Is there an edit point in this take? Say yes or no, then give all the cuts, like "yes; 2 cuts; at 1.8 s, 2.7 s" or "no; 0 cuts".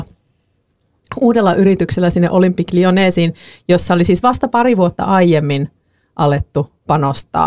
no; 0 cuts